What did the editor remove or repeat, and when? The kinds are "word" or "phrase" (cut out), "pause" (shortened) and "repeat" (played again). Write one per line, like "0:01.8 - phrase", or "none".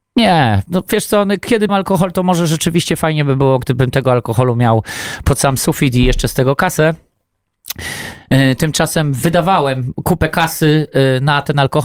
0:01.7 - word